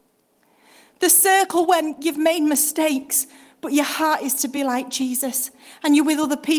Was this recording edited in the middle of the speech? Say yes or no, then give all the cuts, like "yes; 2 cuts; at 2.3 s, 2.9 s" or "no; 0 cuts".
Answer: no; 0 cuts